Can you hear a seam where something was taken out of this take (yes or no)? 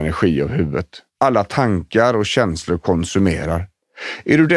yes